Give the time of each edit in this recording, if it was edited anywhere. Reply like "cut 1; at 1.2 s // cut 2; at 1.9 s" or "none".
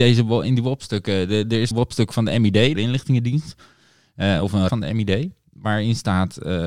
cut 1; at 1.7 s // cut 2; at 2.7 s // cut 3; at 4.7 s